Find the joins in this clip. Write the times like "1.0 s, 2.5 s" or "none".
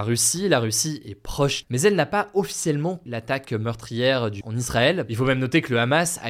1.6 s, 3.1 s, 4.4 s